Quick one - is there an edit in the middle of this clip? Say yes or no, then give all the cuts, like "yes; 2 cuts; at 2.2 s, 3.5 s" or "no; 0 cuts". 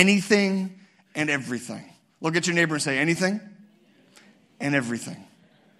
no; 0 cuts